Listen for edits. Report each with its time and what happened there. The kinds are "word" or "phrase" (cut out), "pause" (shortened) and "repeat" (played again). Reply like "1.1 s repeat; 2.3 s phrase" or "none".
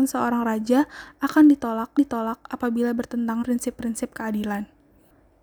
2.0 s repeat; 3.4 s phrase